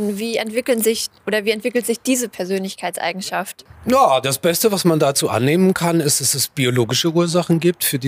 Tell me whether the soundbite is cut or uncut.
cut